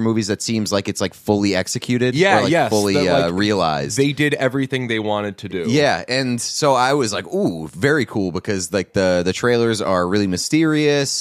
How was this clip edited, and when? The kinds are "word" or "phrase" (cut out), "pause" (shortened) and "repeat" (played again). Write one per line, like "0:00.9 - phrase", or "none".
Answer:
none